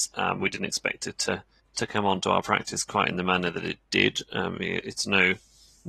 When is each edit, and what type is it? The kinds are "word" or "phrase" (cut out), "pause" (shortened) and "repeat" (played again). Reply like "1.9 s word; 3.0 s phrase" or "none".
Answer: 1.6 s pause